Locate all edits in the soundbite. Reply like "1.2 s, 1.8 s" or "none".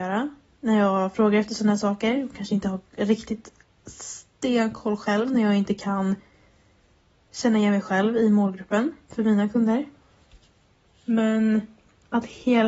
none